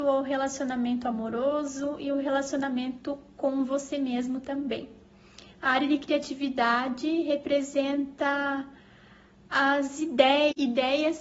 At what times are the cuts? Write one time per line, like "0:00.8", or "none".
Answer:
none